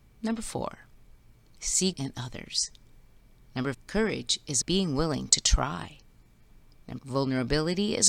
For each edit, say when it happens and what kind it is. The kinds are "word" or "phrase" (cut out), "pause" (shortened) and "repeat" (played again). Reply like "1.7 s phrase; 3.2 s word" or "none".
1.9 s word; 3.7 s word; 4.6 s word; 7.0 s word